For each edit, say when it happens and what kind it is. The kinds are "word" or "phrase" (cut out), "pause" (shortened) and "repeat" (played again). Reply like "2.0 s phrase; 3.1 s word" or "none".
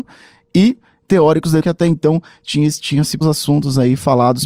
1.6 s word; 3.2 s word